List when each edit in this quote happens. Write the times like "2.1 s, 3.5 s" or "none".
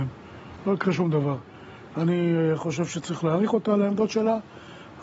none